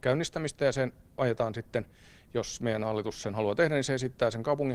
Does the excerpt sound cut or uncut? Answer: uncut